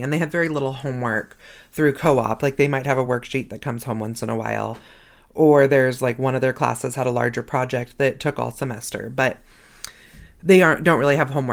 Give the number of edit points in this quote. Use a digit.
0